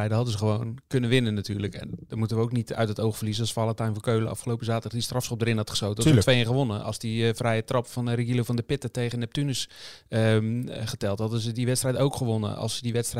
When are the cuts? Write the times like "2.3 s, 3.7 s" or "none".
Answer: none